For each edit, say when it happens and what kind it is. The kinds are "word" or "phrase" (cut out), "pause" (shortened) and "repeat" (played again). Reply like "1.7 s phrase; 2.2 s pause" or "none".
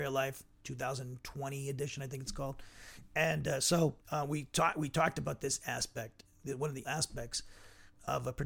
4.0 s pause; 6.8 s word